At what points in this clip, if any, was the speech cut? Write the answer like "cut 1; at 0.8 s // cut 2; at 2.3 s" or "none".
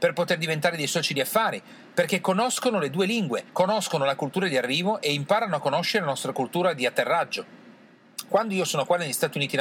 cut 1; at 3.5 s